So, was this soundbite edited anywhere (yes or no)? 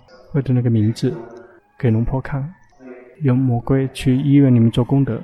yes